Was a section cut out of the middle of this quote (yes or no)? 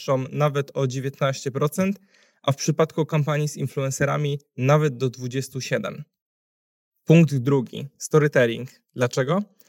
no